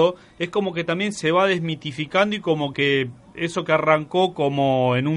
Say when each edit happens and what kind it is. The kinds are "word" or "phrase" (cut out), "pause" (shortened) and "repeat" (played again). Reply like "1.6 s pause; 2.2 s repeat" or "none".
none